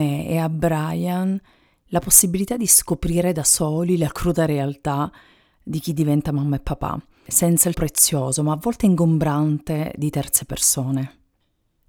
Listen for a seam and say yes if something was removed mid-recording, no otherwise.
yes